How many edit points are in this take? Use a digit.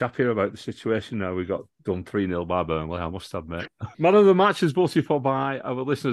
1